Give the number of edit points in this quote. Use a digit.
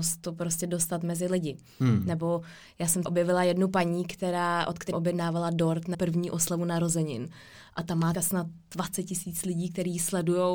4